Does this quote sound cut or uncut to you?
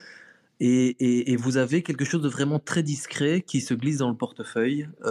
uncut